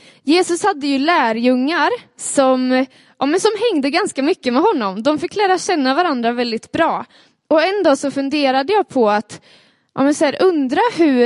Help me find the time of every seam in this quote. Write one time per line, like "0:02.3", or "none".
none